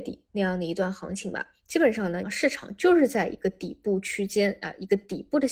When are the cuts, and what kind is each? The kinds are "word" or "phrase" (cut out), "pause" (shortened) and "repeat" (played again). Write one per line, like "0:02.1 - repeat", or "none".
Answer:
0:02.2 - phrase